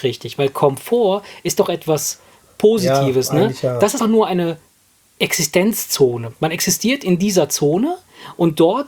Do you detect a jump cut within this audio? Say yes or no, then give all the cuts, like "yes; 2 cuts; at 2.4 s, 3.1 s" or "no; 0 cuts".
yes; 1 cut; at 4.0 s